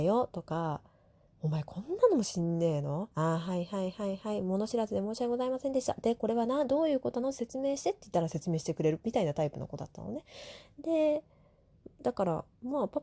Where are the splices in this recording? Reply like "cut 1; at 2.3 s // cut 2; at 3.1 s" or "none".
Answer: cut 1; at 3.1 s